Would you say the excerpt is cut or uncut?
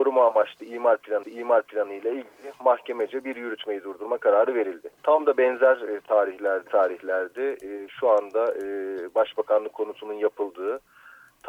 cut